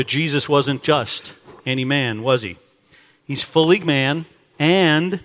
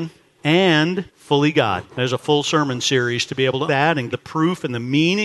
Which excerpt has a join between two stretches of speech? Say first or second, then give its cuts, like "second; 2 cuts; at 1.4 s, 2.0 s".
second; 4 cuts; at 1.1 s, 1.9 s, 3.7 s, 4.1 s